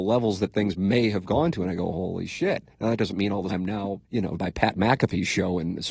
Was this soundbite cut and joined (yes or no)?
yes